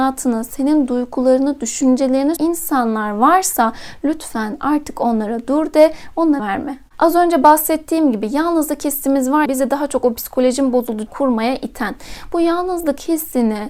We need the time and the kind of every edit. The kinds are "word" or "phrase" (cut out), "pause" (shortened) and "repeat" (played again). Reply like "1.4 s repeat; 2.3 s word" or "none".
2.4 s word; 6.4 s word; 9.5 s word; 11.1 s word